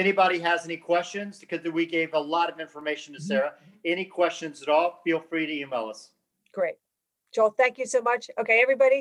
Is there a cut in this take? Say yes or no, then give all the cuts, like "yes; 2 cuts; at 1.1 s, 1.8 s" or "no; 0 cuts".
no; 0 cuts